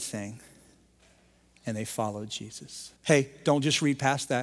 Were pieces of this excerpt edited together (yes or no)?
yes